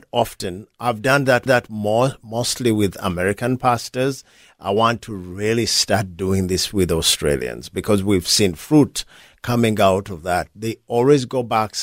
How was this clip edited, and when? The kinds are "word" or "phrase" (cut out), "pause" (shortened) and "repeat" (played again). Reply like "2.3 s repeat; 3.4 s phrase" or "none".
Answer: 1.5 s repeat